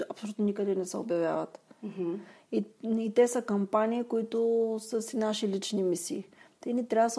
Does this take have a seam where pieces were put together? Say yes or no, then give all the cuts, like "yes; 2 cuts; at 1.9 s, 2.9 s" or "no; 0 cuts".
no; 0 cuts